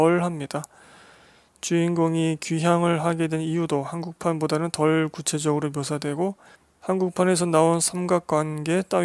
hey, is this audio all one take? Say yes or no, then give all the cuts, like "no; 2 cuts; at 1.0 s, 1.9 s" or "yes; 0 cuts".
no; 1 cut; at 6.5 s